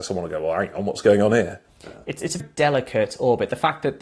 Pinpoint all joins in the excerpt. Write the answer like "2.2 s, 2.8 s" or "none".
2.4 s